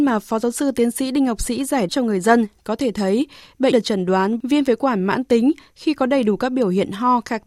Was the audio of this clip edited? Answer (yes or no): yes